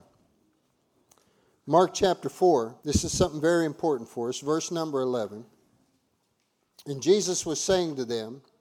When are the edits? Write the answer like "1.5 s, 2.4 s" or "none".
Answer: 2.8 s